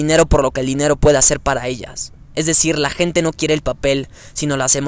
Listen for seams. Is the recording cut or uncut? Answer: cut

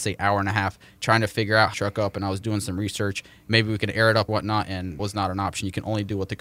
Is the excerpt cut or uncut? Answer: cut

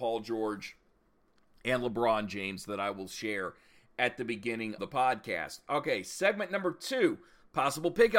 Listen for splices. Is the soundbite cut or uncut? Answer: cut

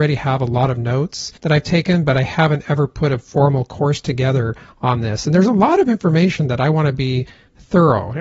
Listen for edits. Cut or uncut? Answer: cut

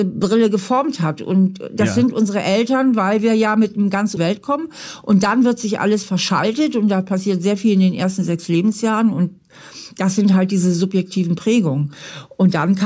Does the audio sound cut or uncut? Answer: cut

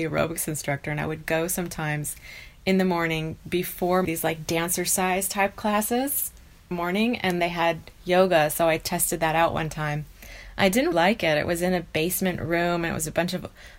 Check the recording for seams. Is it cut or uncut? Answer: cut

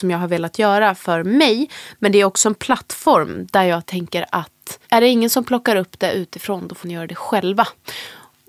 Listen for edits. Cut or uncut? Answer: cut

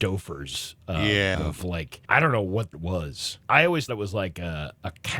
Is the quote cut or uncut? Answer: cut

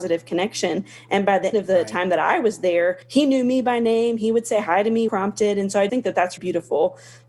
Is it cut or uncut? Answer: cut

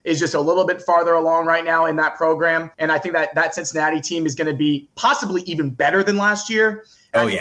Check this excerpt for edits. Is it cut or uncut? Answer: cut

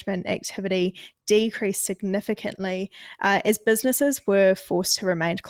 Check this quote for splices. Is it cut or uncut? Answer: uncut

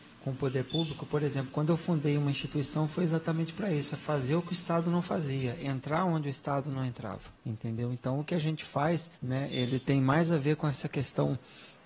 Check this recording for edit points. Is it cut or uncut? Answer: cut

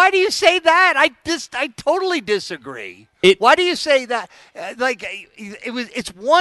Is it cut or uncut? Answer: uncut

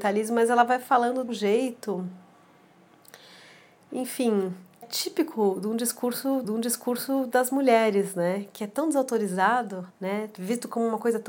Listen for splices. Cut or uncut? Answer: cut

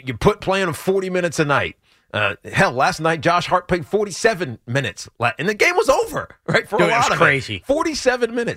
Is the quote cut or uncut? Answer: uncut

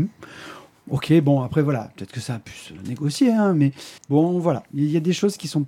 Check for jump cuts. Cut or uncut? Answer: cut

